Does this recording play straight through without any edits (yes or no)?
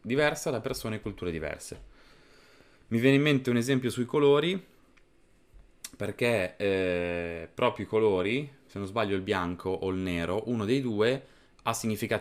yes